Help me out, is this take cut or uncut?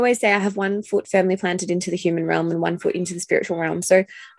uncut